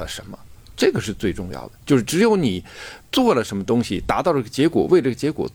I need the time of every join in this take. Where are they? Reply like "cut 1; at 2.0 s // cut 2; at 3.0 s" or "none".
cut 1; at 3.0 s

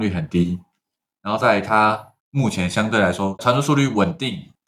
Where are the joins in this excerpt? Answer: cut 1; at 2.2 s // cut 2; at 3.4 s

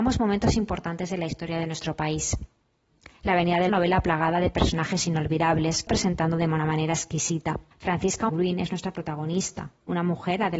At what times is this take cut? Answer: cut 1; at 3.1 s // cut 2; at 3.7 s // cut 3; at 5.9 s // cut 4; at 7.7 s // cut 5; at 8.3 s

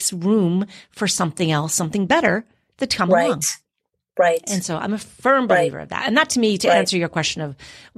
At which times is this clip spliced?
none

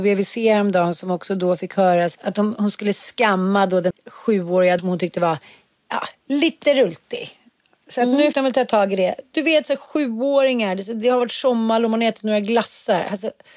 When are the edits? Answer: cut 1; at 2.1 s // cut 2; at 3.9 s // cut 3; at 4.8 s // cut 4; at 8.3 s

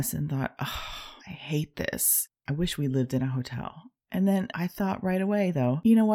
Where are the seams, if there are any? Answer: cut 1; at 1.2 s

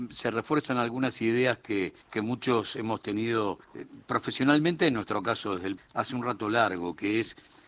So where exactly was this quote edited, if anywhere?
cut 1; at 2.0 s // cut 2; at 3.6 s // cut 3; at 5.8 s

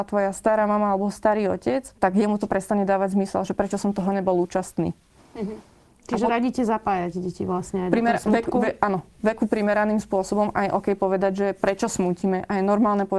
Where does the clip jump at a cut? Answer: cut 1; at 2.0 s

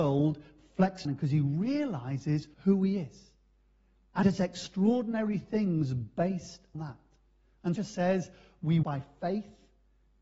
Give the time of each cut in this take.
cut 1; at 1.0 s // cut 2; at 2.5 s // cut 3; at 4.2 s // cut 4; at 6.7 s // cut 5; at 7.8 s // cut 6; at 8.8 s

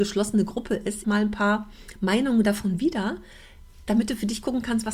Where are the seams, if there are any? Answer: cut 1; at 1.0 s

